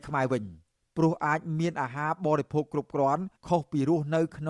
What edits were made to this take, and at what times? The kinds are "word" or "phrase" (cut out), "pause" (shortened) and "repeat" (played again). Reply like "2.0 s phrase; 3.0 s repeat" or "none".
3.4 s pause